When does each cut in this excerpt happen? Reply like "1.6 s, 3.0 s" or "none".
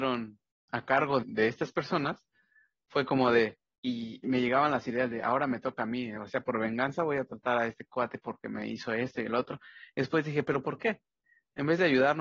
1.2 s, 3.8 s, 4.2 s